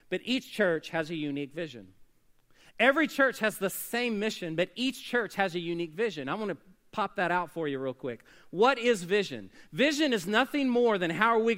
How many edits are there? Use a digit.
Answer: 0